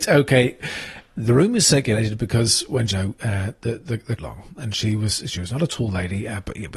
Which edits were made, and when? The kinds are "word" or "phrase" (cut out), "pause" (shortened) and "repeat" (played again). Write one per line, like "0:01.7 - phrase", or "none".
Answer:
0:02.9 - phrase
0:04.2 - phrase

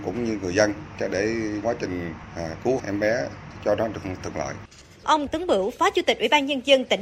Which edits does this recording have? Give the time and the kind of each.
0:01.6 - word
0:02.8 - word
0:05.3 - word

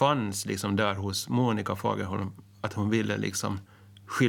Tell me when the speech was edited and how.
none

